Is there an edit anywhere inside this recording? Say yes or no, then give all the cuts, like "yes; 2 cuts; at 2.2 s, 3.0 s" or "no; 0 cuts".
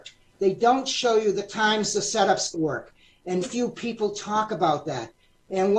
yes; 2 cuts; at 2.5 s, 3.4 s